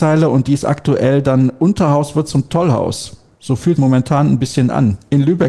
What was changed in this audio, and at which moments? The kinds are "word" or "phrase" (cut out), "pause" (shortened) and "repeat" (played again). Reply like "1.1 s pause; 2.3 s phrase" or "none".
3.8 s phrase